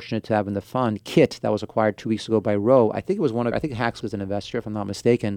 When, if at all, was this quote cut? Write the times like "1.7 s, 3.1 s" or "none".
3.5 s, 4.0 s